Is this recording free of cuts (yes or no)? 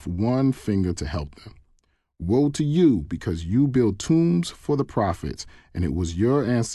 yes